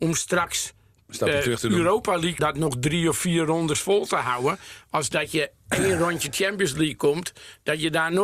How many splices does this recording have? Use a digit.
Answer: 1